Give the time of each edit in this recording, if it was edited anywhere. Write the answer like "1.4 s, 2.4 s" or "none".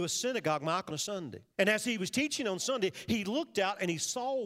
0.9 s, 1.5 s